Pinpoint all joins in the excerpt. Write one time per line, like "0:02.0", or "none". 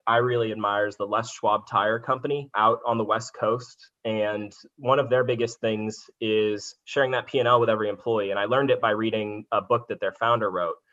none